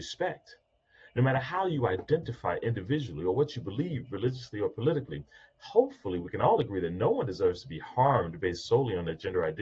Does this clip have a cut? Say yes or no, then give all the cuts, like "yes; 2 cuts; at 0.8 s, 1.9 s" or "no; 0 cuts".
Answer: no; 0 cuts